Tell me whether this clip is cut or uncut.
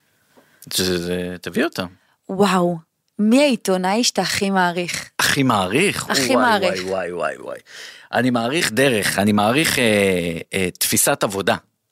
cut